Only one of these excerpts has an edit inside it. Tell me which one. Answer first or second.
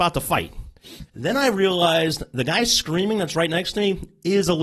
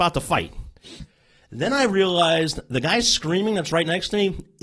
first